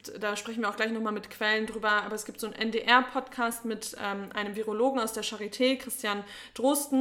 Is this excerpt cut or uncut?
uncut